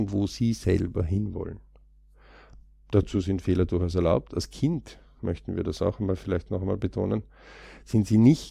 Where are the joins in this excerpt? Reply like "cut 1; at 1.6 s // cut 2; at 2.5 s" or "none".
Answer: none